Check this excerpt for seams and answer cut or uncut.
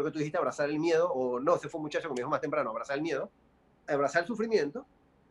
uncut